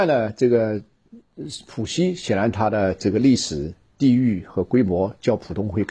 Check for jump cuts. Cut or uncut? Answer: uncut